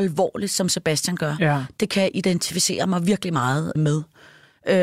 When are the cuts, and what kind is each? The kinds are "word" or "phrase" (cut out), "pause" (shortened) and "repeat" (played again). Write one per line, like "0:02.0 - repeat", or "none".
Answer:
0:03.8 - word